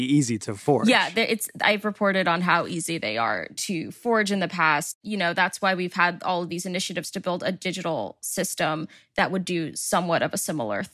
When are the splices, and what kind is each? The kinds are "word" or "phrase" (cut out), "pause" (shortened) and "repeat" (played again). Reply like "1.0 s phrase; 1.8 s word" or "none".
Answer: none